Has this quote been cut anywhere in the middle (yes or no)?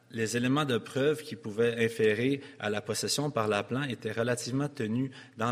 no